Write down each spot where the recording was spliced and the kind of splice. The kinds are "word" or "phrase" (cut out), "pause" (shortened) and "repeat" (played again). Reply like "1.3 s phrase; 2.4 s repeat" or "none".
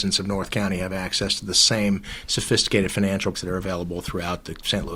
3.3 s word